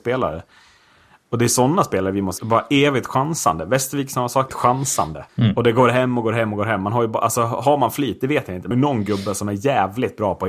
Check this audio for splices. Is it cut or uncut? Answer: cut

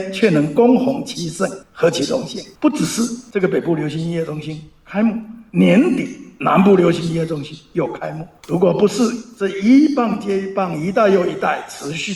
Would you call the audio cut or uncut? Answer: cut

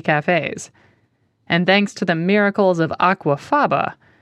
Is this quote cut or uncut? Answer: uncut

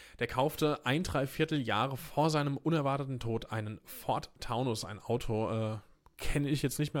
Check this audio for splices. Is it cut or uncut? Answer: uncut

